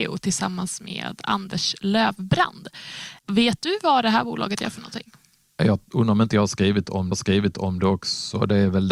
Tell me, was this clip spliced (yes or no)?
yes